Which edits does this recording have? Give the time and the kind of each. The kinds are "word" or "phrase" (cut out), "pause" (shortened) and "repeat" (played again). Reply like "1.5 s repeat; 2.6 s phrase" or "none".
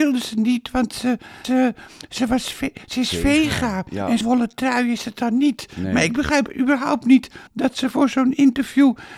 1.4 s phrase; 4.2 s word; 7.5 s pause

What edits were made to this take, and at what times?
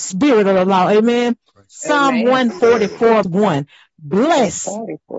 3.2 s word

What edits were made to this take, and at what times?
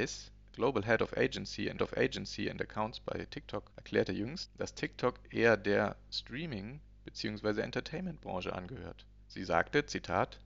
1.8 s repeat

